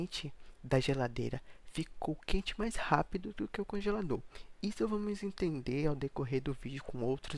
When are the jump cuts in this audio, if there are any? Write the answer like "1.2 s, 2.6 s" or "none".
none